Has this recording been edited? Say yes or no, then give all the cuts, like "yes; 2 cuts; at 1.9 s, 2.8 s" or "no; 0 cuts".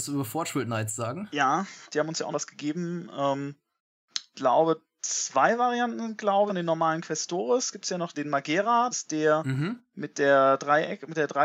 yes; 6 cuts; at 1.9 s, 2.3 s, 4.3 s, 6.5 s, 8.1 s, 8.9 s